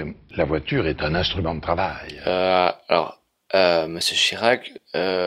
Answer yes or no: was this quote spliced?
no